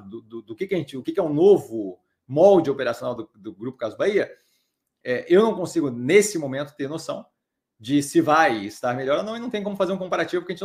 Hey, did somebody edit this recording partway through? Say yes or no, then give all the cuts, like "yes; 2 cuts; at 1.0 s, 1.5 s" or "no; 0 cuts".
no; 0 cuts